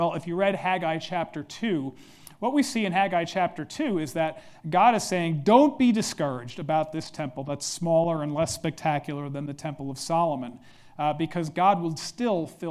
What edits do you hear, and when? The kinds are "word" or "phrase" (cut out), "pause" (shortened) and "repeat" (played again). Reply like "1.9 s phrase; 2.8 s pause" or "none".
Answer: none